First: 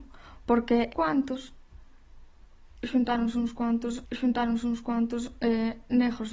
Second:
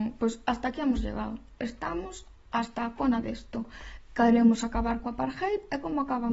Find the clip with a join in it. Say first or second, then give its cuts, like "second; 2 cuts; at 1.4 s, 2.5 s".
first; 2 cuts; at 0.9 s, 4.1 s